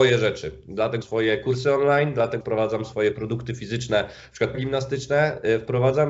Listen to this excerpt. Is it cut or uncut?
cut